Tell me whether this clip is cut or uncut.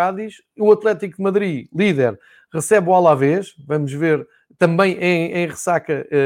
uncut